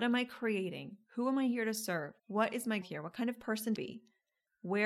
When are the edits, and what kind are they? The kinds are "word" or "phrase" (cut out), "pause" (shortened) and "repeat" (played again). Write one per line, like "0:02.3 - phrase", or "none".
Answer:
0:02.2 - pause
0:02.8 - word
0:03.8 - phrase